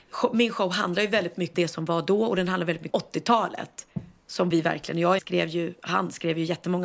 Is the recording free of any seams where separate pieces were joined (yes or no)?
no